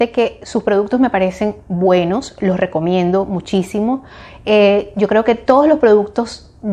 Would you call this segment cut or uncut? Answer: uncut